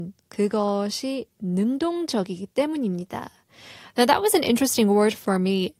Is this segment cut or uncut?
uncut